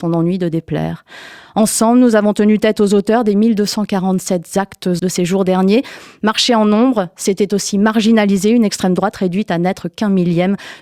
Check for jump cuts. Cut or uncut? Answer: cut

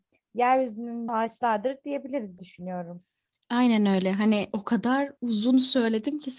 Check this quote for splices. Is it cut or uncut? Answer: cut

